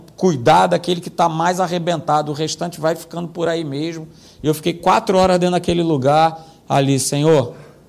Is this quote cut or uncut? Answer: uncut